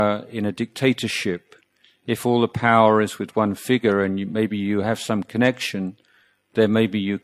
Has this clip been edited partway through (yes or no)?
no